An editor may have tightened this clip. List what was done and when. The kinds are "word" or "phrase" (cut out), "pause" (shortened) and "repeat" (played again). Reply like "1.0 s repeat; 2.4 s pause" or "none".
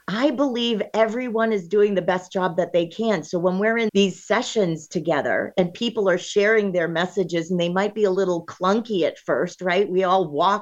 3.9 s word

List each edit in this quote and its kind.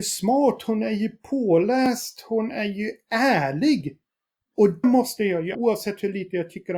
4.8 s word; 5.5 s word

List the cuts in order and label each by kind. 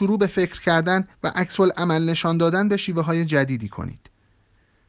1.1 s pause

